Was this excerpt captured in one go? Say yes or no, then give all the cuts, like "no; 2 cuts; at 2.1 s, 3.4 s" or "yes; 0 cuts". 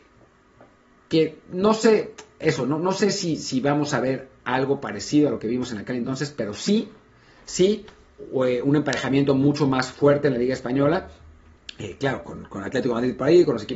yes; 0 cuts